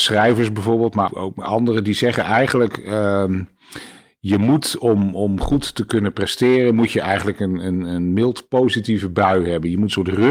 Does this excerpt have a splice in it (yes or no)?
yes